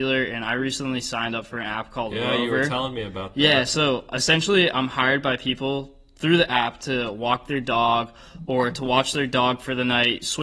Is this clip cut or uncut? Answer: uncut